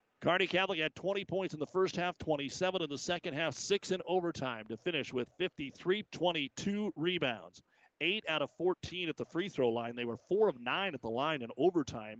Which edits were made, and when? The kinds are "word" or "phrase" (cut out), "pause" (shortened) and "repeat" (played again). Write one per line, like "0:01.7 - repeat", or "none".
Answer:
0:06.0 - word